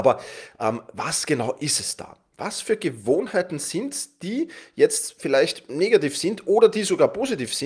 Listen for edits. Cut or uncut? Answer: uncut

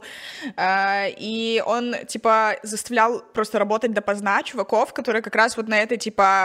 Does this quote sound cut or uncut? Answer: uncut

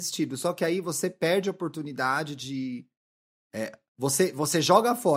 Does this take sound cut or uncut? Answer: uncut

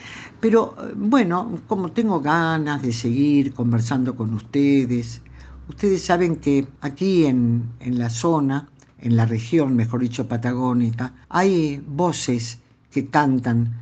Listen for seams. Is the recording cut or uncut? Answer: cut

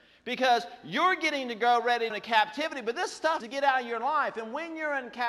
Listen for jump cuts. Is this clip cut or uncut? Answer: cut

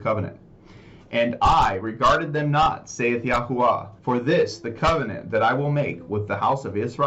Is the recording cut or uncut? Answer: cut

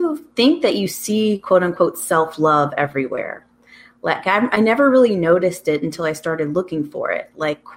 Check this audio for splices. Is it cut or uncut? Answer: uncut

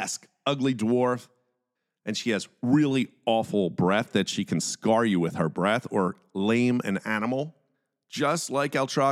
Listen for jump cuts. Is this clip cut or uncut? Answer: uncut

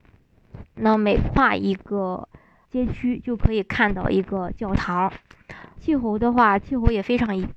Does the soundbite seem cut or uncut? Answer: cut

